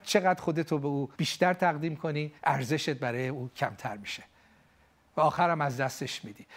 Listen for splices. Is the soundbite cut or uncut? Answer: cut